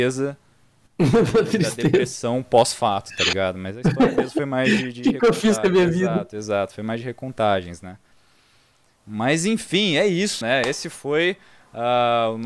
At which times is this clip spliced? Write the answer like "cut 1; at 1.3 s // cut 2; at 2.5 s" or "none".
cut 1; at 10.4 s